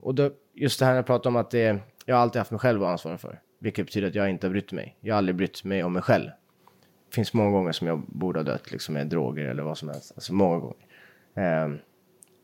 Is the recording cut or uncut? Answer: uncut